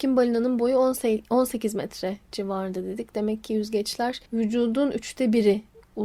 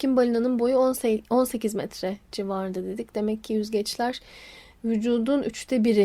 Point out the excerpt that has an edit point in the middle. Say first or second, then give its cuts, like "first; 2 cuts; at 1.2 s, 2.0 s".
first; 1 cut; at 4.3 s